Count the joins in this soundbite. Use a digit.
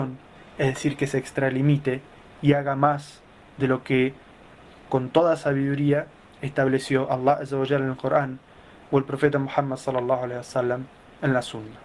0